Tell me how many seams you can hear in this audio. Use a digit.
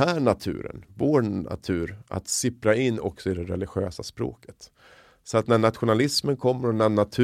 0